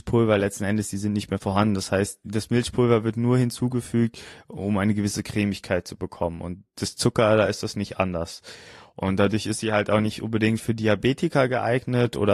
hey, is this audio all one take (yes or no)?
yes